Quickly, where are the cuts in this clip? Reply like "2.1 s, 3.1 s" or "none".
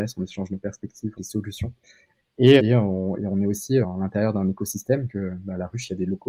1.2 s, 2.6 s, 3.8 s, 5.1 s